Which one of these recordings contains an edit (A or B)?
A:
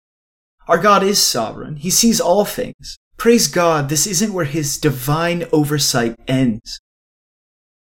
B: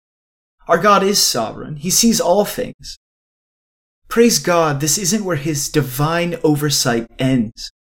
A